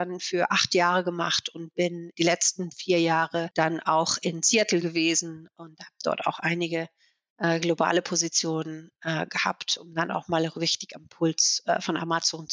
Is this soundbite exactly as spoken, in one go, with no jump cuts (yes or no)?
yes